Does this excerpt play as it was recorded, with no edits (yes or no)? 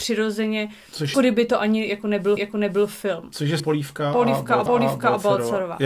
no